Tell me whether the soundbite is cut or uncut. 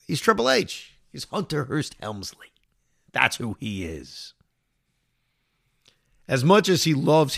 uncut